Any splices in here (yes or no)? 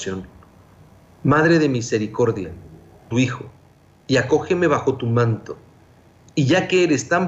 yes